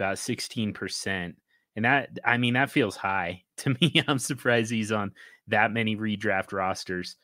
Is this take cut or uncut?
uncut